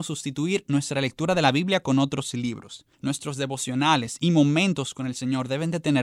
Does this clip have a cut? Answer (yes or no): yes